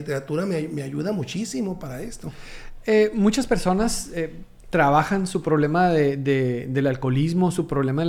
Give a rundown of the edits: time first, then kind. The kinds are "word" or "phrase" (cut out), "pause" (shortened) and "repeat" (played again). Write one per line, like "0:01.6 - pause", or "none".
none